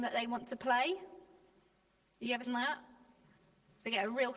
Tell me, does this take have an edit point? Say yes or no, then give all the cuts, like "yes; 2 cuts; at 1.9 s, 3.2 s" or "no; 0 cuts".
yes; 1 cut; at 2.5 s